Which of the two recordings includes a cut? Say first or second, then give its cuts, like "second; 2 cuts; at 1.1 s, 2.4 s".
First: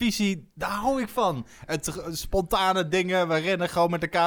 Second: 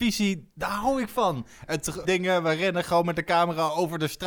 second; 1 cut; at 2.0 s